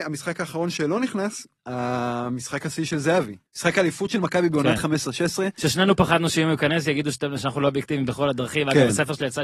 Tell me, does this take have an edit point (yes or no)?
yes